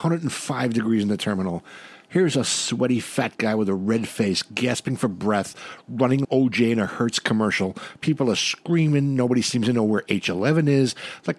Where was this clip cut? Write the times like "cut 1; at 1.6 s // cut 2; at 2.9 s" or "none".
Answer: cut 1; at 6.2 s